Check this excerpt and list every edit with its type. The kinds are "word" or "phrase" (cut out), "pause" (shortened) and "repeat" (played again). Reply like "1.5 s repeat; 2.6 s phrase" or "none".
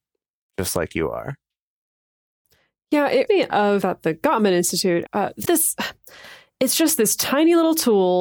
3.3 s word; 3.8 s word; 5.1 s word; 5.4 s word